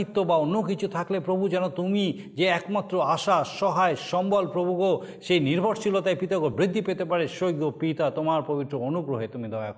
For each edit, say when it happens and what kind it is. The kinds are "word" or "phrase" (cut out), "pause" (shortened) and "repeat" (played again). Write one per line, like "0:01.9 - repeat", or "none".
none